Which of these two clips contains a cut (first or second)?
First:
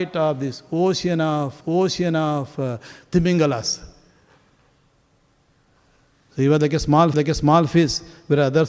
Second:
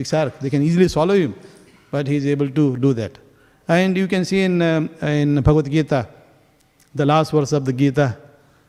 first